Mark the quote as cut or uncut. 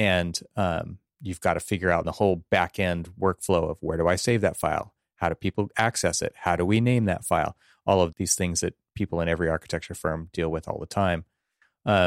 cut